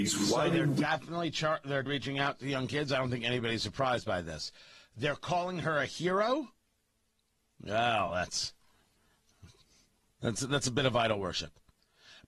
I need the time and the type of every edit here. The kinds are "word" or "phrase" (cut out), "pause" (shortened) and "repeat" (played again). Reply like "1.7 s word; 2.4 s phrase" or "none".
1.9 s word; 10.3 s word